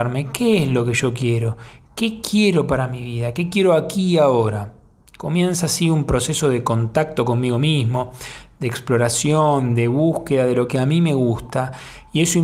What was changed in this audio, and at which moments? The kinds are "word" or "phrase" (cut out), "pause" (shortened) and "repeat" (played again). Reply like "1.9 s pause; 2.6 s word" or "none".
none